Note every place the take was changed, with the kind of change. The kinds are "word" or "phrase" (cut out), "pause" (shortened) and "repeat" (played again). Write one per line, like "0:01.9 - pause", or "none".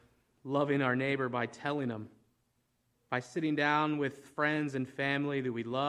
none